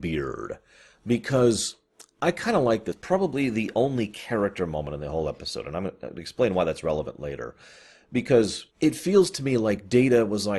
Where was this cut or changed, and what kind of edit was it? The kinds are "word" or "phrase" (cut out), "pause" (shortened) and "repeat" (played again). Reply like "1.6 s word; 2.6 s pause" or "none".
8.7 s pause